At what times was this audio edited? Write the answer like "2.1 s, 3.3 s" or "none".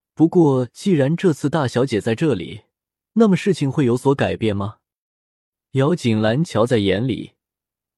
none